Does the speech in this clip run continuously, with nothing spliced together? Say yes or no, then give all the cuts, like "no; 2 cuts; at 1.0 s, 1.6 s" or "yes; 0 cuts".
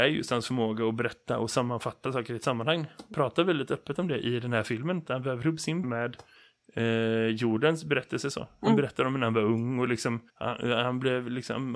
no; 6 cuts; at 2.1 s, 3.1 s, 5.1 s, 5.8 s, 6.4 s, 10.3 s